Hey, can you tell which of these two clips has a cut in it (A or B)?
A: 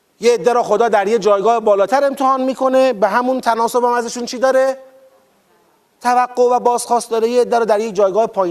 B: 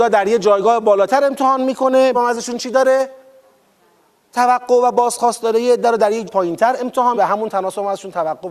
B